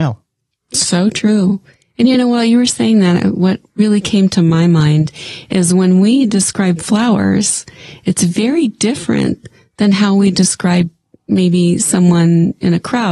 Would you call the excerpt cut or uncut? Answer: uncut